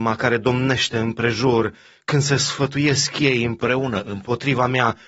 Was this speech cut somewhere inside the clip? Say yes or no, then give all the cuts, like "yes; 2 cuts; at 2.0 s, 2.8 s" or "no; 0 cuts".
no; 0 cuts